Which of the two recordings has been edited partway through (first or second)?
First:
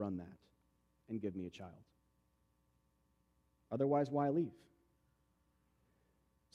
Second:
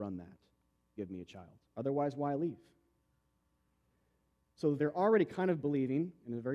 second